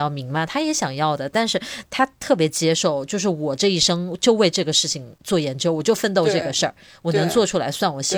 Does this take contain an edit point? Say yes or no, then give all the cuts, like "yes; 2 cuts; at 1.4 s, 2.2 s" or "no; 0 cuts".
no; 0 cuts